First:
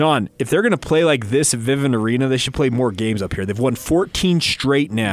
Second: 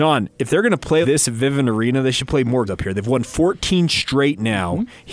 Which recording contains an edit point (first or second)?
second